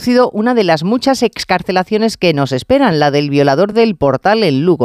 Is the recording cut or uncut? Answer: uncut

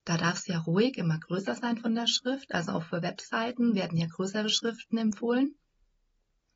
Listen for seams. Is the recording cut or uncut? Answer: uncut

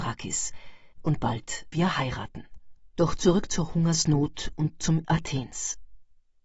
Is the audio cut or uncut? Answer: cut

